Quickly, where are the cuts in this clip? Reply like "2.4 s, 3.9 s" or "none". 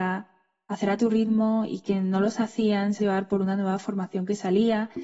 3.0 s